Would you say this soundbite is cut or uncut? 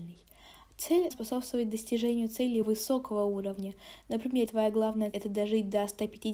cut